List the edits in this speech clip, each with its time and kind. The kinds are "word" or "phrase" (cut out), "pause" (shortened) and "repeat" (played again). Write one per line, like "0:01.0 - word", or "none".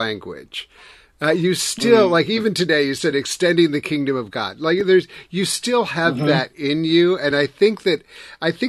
none